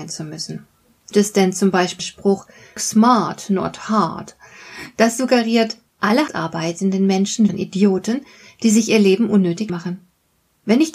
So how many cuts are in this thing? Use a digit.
6